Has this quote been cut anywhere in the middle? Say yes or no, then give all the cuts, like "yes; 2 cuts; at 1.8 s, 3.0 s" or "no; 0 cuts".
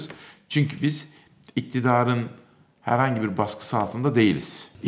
no; 0 cuts